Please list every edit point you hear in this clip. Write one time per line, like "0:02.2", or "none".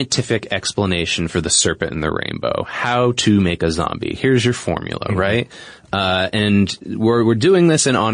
none